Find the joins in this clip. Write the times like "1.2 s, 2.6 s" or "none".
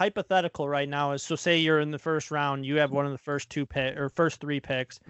none